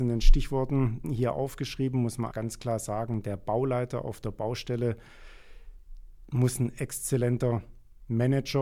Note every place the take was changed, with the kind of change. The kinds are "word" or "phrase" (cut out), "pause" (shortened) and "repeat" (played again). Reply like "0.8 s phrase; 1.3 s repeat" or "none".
1.0 s word; 2.3 s word